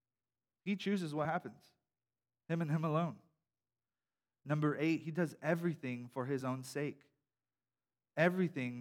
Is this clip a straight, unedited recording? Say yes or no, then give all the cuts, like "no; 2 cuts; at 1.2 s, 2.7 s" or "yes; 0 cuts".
yes; 0 cuts